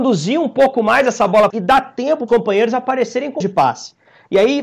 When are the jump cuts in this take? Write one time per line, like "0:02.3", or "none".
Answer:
0:01.5
0:02.3
0:03.4